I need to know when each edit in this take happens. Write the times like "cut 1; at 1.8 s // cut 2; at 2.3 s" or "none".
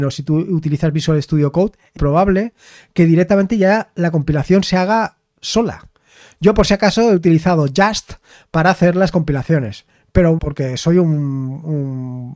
cut 1; at 2.0 s // cut 2; at 10.4 s